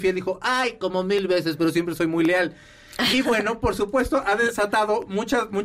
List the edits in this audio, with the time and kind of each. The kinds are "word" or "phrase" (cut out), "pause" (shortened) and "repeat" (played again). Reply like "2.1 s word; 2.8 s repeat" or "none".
none